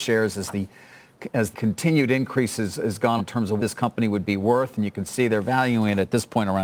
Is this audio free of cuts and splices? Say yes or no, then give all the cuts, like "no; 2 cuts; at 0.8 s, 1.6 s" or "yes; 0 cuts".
no; 3 cuts; at 1.5 s, 3.2 s, 3.6 s